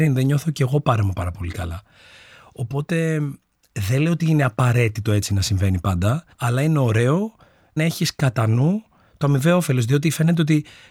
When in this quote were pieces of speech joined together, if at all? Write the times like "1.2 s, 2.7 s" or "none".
6.3 s, 7.8 s